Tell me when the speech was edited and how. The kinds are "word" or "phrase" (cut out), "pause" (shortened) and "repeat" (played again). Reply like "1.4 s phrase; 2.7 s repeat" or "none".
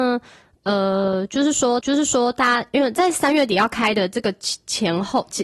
1.8 s repeat